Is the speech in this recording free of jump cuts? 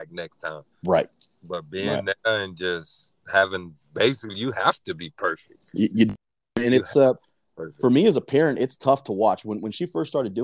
yes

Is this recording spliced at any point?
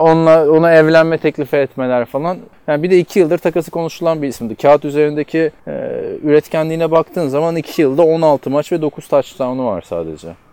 yes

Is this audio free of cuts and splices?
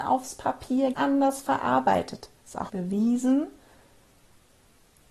no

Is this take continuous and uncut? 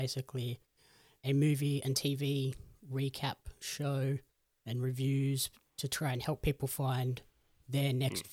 yes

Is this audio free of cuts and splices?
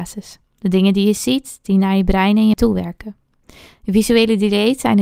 no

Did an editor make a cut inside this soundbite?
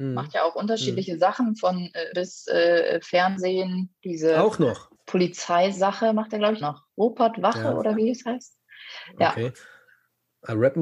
yes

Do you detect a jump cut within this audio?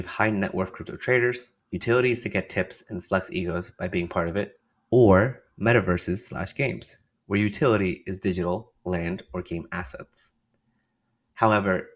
yes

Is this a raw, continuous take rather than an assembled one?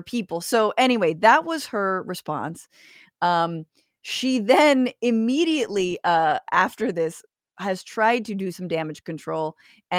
yes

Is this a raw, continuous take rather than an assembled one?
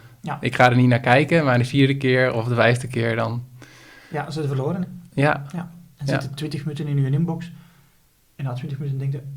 yes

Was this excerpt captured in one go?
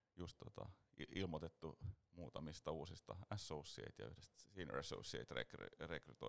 yes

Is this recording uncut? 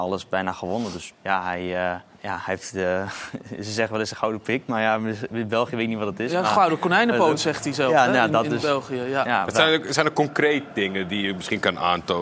no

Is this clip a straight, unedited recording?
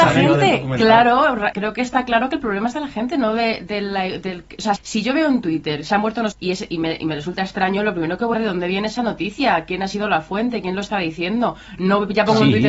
no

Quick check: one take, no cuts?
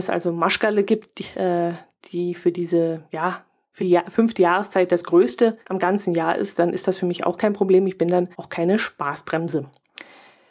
no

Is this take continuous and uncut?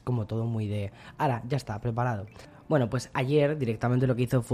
yes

